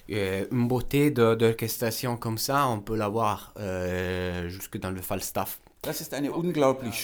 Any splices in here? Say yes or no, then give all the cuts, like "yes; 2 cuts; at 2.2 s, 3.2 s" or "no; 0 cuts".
no; 0 cuts